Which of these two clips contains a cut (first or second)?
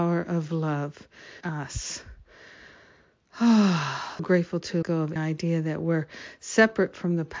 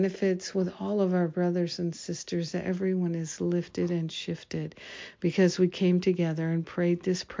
first